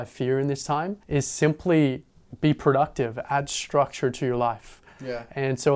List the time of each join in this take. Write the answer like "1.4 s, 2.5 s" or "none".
1.0 s